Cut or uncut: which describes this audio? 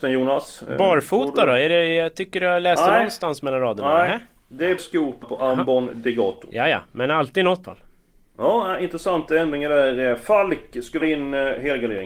cut